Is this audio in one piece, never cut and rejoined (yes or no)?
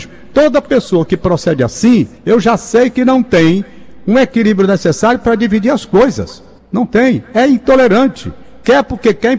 no